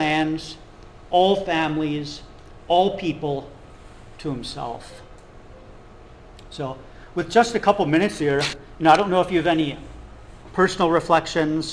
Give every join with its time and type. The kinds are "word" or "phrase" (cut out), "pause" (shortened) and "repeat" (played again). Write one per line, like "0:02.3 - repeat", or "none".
none